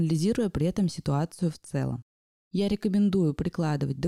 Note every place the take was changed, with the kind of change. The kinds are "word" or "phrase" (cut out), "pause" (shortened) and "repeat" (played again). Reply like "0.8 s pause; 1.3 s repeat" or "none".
none